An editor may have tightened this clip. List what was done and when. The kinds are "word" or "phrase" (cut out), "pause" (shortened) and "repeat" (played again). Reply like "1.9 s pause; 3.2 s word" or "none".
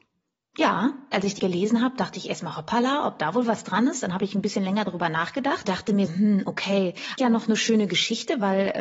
1.4 s word; 5.6 s word; 6.1 s word; 7.2 s word